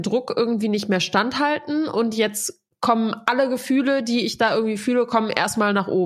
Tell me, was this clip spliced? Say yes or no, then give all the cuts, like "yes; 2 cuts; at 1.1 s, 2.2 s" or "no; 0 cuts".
no; 0 cuts